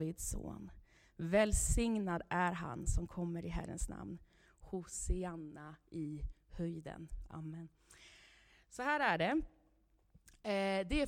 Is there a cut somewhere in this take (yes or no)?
no